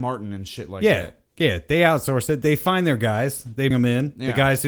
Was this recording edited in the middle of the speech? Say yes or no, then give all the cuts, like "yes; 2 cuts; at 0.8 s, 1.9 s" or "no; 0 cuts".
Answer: yes; 2 cuts; at 1.3 s, 3.7 s